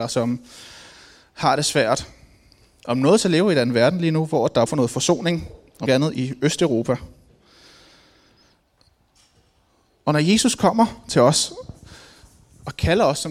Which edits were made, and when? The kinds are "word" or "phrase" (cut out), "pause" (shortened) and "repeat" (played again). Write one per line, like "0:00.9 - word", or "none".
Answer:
0:04.7 - word
0:05.9 - word